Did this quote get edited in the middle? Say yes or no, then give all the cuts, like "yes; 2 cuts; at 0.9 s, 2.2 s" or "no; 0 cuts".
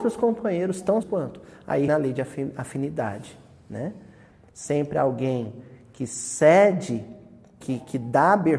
yes; 3 cuts; at 1.0 s, 1.9 s, 7.6 s